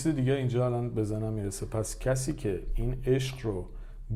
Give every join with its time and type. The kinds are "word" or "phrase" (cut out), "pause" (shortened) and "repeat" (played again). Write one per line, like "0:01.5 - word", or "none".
none